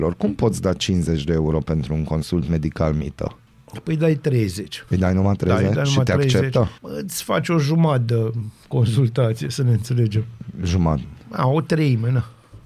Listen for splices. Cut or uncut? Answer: cut